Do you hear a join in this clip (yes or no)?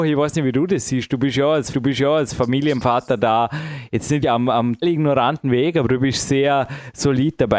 yes